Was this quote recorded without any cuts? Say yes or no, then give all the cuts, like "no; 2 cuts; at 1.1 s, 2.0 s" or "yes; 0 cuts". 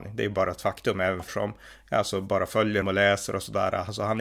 no; 2 cuts; at 1.3 s, 2.8 s